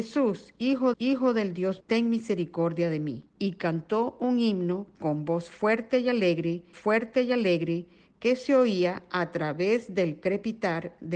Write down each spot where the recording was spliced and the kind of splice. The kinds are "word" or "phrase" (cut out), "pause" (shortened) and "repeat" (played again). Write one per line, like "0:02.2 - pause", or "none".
0:00.9 - repeat
0:01.8 - word
0:03.3 - pause
0:06.7 - repeat